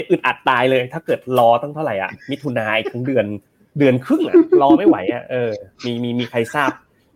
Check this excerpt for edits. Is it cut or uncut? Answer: uncut